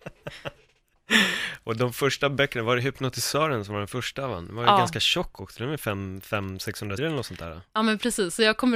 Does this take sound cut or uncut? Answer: cut